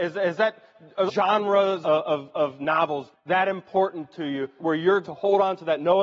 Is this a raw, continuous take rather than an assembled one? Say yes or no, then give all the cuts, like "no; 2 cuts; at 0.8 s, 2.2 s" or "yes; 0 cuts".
no; 5 cuts; at 1.1 s, 1.8 s, 3.1 s, 4.6 s, 5.0 s